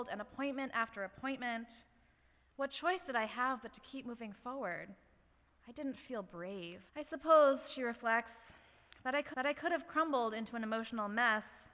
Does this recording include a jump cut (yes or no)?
yes